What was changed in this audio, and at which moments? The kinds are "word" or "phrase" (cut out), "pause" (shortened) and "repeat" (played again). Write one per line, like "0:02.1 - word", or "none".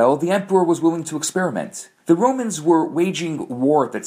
0:02.0 - pause

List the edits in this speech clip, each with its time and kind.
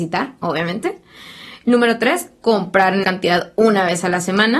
0:03.0 - word

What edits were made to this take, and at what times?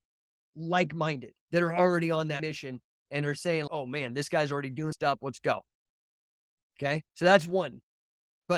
0:01.4 - pause
0:03.7 - word
0:04.9 - word
0:07.1 - pause

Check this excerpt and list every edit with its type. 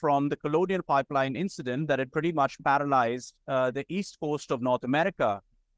0:03.4 - pause

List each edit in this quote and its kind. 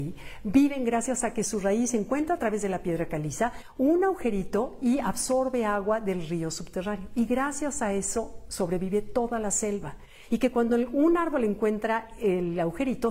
none

